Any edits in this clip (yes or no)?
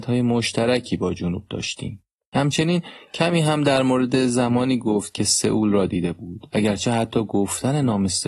no